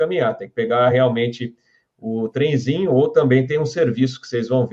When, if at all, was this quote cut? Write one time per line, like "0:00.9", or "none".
none